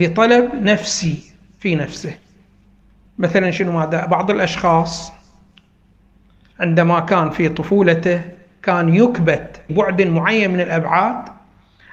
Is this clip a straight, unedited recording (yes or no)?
no